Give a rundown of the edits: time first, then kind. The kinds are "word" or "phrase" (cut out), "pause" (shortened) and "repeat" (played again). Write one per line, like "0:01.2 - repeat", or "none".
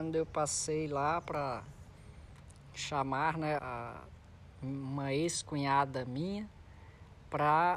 0:03.6 - word